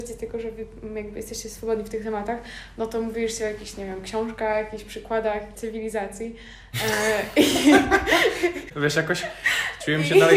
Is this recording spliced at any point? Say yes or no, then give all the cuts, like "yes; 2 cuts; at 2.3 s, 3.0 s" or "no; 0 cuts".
no; 0 cuts